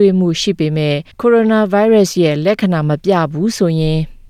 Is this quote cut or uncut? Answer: cut